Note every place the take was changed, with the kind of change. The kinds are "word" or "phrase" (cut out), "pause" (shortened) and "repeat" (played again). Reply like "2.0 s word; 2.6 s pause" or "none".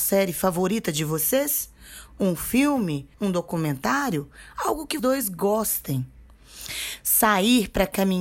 3.1 s pause; 5.0 s word